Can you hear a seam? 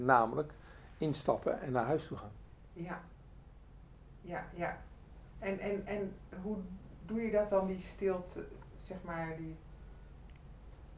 no; 0 cuts

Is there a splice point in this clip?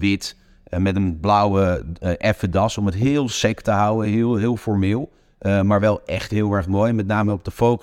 no; 0 cuts

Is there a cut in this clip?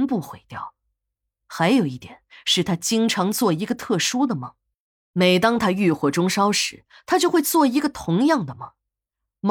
no; 0 cuts

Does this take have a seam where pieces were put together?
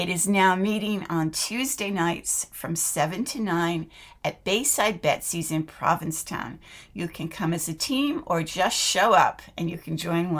no; 0 cuts

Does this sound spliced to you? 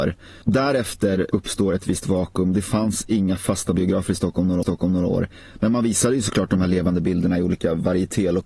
yes; 1 cut; at 4.6 s

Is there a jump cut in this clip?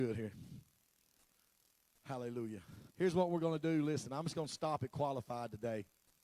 yes; 1 cut; at 2.9 s

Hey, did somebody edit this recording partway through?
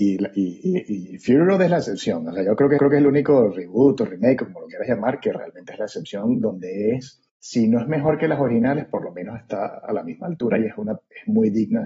yes; 2 cuts; at 2.8 s, 7.3 s

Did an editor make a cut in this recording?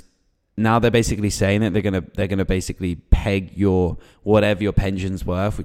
no; 0 cuts

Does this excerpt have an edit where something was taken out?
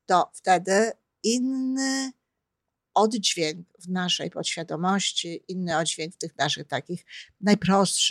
no; 0 cuts

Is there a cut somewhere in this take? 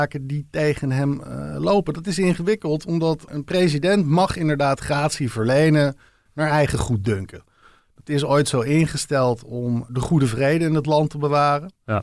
no; 0 cuts

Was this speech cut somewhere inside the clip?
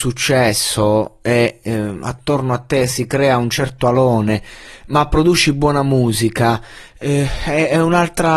no; 0 cuts

